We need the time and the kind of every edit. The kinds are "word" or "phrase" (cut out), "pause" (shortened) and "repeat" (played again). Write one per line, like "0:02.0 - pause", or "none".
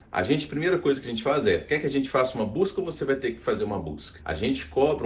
none